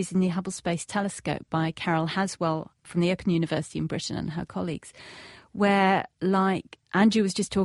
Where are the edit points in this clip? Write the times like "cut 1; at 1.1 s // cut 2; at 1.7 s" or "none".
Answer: none